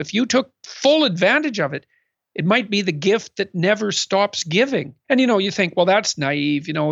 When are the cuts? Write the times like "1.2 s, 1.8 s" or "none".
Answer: none